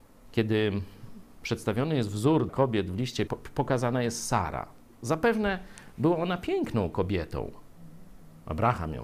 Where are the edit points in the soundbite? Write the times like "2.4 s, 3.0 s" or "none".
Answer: 2.5 s, 3.3 s

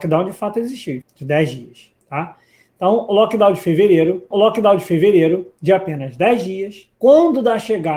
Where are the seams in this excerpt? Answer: 1.0 s, 2.0 s, 4.3 s, 7.0 s

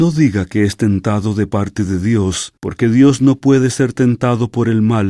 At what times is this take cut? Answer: 2.6 s

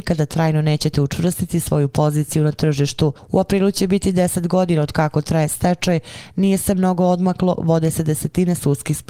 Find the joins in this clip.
none

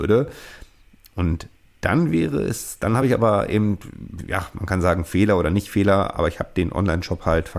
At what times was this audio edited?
none

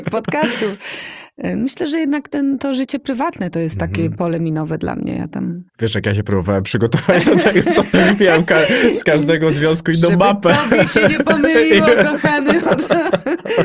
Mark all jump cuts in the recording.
5.7 s

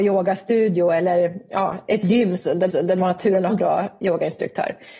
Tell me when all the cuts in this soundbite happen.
2.7 s, 3.5 s

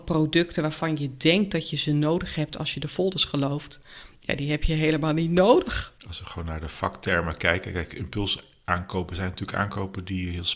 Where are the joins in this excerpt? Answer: none

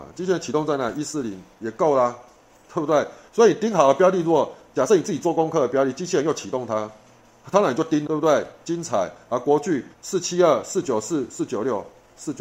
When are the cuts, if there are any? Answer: 8.1 s, 9.9 s

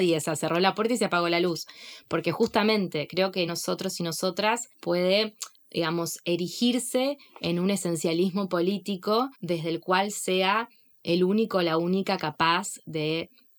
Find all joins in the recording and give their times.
3.5 s, 4.7 s, 9.3 s, 11.0 s

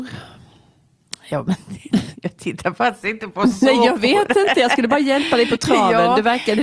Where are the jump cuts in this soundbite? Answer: none

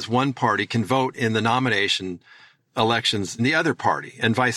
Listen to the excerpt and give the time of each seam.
3.4 s

